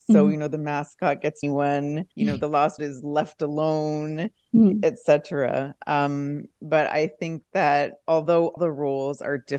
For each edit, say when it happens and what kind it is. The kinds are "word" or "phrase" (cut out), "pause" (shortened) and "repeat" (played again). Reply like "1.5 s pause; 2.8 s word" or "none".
1.4 s phrase; 2.1 s pause; 2.8 s word; 6.5 s pause; 8.6 s word